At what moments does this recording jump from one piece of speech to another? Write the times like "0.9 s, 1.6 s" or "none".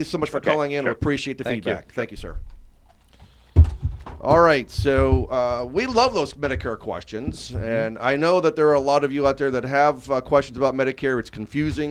none

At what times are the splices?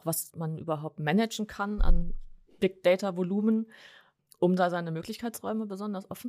none

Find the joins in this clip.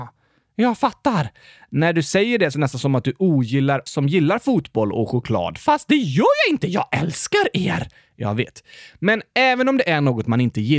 2.5 s, 3.9 s

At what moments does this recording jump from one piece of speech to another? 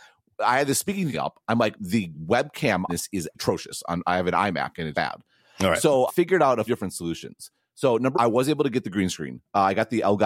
1.1 s, 1.8 s, 2.9 s, 3.3 s, 4.9 s, 6.1 s, 6.7 s, 8.1 s

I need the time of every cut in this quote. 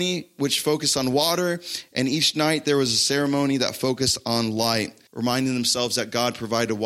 5.1 s

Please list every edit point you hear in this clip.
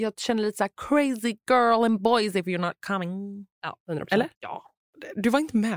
3.8 s, 4.3 s

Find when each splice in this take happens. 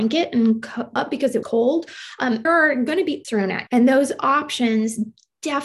1.0 s, 1.4 s, 2.4 s, 3.2 s, 3.7 s

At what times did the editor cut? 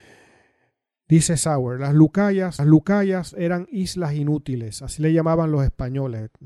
2.6 s

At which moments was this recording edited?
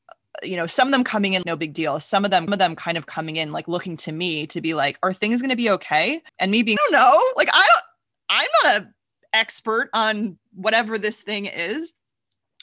1.4 s, 2.5 s, 6.3 s, 6.8 s

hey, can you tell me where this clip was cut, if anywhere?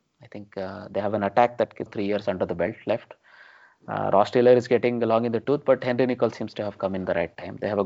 1.9 s

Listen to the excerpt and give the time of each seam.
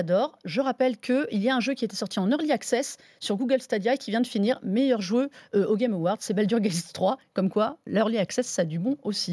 none

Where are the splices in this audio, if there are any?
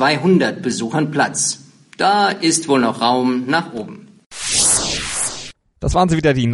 none

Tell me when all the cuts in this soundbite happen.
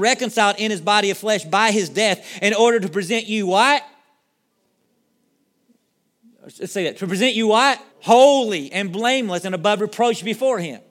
7.9 s

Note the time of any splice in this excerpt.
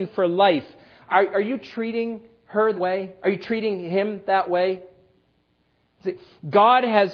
2.7 s

